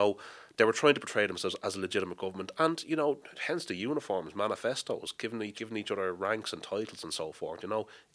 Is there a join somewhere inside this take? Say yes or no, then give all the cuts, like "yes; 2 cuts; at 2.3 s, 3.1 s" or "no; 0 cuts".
yes; 1 cut; at 5.5 s